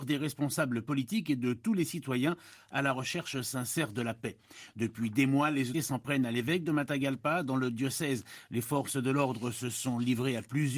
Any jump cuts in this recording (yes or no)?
yes